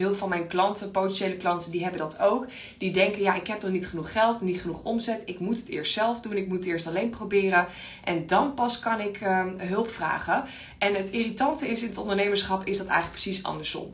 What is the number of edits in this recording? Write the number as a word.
zero